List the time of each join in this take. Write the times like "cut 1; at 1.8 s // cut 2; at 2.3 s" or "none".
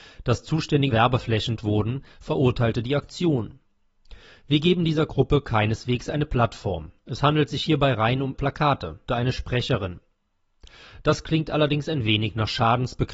cut 1; at 0.9 s // cut 2; at 1.6 s // cut 3; at 8.3 s // cut 4; at 9.1 s